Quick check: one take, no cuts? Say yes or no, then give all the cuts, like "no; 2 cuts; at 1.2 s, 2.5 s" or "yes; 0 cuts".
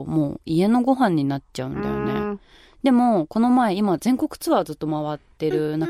yes; 0 cuts